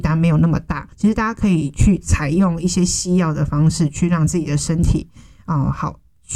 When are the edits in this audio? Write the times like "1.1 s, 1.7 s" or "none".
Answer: 0.9 s